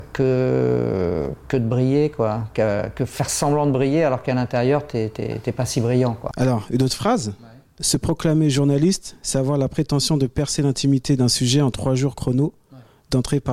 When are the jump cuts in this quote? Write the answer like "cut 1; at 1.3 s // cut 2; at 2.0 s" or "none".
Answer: none